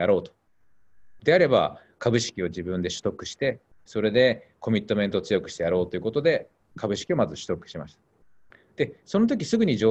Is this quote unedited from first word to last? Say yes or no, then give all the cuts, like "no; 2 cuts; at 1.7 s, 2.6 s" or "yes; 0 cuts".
yes; 0 cuts